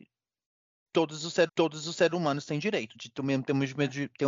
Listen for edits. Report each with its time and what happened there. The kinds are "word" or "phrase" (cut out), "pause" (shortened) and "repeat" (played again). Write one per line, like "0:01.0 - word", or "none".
0:01.5 - repeat
0:02.9 - word